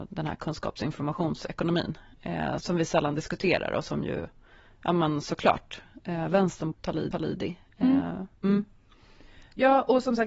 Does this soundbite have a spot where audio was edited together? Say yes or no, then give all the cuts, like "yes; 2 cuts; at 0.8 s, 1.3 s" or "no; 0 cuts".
yes; 4 cuts; at 2.6 s, 6.7 s, 7.1 s, 8.3 s